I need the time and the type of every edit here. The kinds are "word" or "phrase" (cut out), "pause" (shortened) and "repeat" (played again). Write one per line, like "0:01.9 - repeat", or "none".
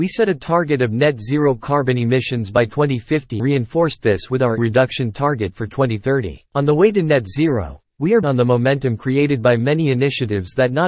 0:03.4 - word
0:04.6 - phrase
0:06.5 - pause
0:08.2 - word